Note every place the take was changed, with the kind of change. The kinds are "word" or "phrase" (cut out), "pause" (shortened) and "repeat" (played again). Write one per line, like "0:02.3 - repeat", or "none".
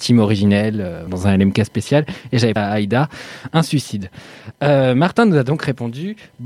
0:01.1 - word
0:02.6 - word